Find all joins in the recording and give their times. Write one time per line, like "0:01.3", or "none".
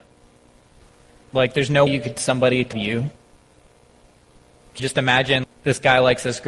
0:01.9
0:02.2
0:02.7
0:04.8
0:05.4